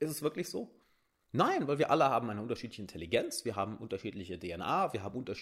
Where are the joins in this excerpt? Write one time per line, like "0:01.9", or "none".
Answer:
none